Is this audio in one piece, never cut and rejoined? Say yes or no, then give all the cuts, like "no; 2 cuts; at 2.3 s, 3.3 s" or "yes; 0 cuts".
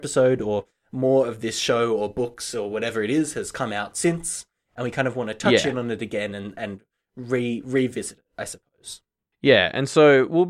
yes; 0 cuts